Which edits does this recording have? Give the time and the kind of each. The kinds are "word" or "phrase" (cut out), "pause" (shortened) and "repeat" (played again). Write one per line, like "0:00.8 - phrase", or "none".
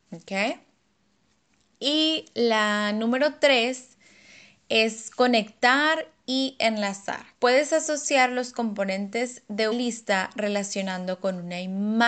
0:07.3 - pause
0:09.7 - word